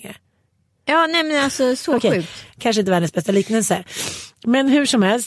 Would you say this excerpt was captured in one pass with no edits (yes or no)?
yes